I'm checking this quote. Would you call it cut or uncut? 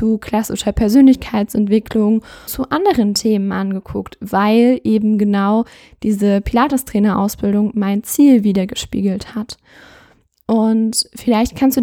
cut